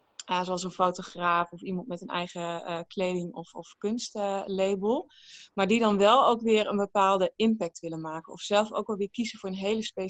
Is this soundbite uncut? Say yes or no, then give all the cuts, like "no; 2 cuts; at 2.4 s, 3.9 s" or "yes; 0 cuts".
yes; 0 cuts